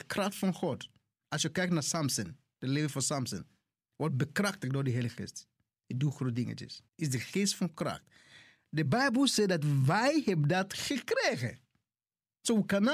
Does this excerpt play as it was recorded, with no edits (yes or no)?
no